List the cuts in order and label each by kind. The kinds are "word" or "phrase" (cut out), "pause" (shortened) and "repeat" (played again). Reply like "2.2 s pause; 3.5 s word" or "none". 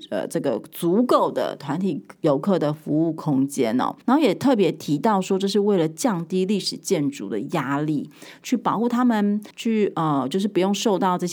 4.0 s pause; 9.5 s pause